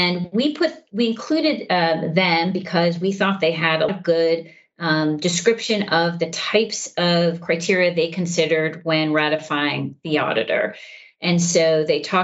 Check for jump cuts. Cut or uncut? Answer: cut